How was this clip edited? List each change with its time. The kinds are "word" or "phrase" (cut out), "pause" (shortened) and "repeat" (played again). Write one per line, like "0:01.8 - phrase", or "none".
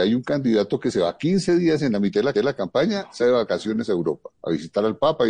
0:02.3 - repeat
0:03.2 - word
0:04.3 - pause